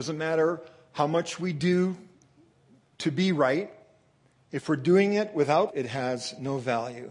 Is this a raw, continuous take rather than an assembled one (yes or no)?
no